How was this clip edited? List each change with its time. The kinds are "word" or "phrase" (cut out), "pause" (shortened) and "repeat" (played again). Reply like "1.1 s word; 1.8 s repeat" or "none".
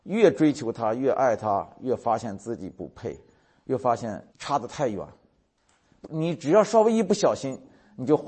4.3 s pause